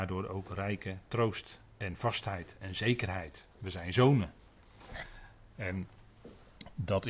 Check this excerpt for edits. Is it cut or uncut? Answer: uncut